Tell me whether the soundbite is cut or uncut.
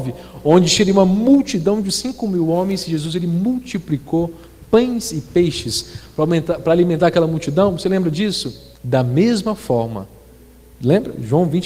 cut